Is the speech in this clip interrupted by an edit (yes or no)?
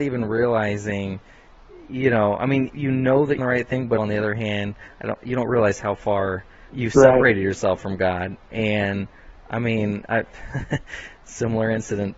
yes